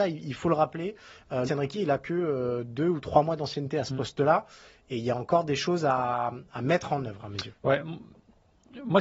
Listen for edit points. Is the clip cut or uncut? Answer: cut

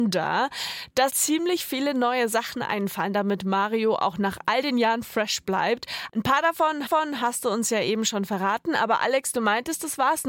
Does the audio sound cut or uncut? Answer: cut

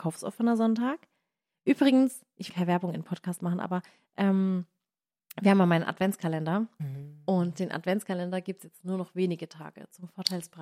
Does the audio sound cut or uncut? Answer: cut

